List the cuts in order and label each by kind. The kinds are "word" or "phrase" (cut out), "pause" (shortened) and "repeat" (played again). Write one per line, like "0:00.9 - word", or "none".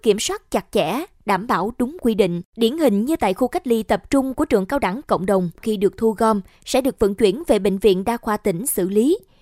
0:02.5 - pause
0:05.6 - phrase